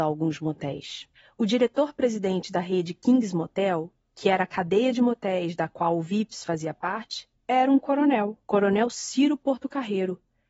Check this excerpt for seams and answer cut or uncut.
cut